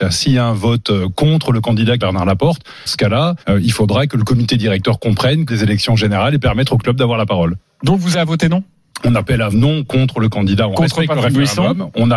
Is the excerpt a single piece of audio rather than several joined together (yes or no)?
no